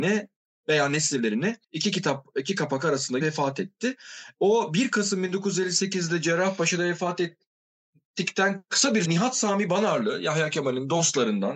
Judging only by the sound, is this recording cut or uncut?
cut